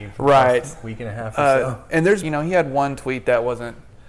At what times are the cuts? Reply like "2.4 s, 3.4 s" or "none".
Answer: 2.2 s